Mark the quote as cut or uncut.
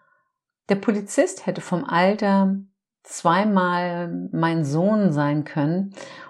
uncut